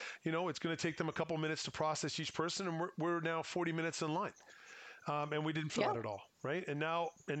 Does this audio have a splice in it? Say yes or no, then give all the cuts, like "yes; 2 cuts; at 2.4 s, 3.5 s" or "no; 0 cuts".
yes; 1 cut; at 5.7 s